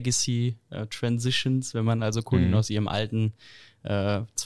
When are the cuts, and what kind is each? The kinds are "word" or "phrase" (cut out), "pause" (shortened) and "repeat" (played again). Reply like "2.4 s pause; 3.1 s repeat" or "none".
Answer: none

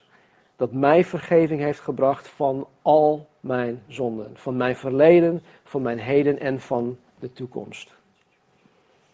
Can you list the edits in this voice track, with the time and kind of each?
2.8 s pause

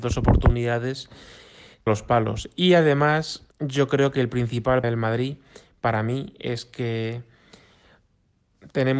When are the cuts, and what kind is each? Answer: 1.9 s phrase; 3.5 s pause; 4.8 s word

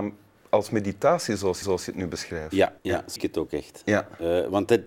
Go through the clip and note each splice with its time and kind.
1.6 s repeat; 2.8 s pause; 3.2 s word

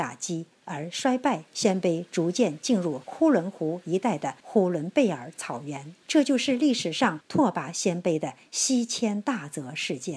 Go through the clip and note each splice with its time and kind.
1.5 s pause; 6.0 s pause

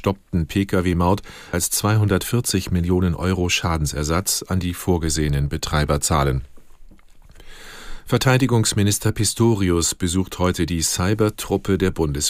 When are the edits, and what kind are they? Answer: 1.5 s word

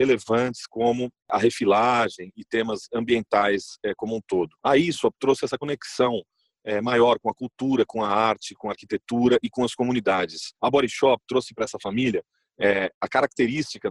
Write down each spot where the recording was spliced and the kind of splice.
4.6 s pause; 10.6 s pause

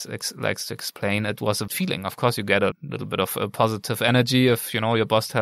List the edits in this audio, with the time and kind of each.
1.7 s phrase; 2.7 s word

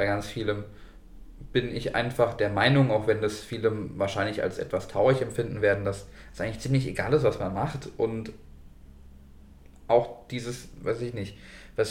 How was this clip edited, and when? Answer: none

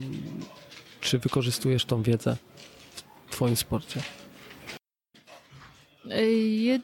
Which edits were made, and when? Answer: none

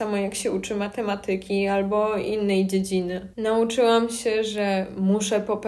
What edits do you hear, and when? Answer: 3.3 s pause

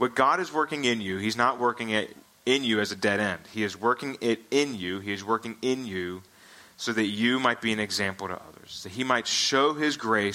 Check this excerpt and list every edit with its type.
none

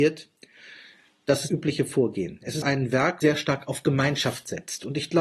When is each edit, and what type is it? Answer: 1.5 s word; 2.6 s word; 3.2 s word

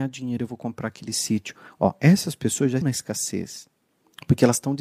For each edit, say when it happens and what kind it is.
2.8 s word

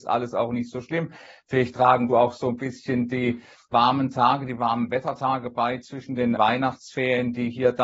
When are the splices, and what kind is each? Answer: 2.1 s word; 3.7 s word; 6.4 s word

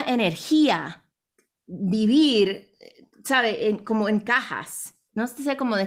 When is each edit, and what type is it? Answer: none

